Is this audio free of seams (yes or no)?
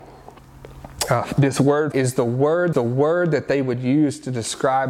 no